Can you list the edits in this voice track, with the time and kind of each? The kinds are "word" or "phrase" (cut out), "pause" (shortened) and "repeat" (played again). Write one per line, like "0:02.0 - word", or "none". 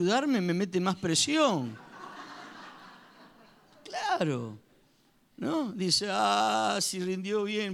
none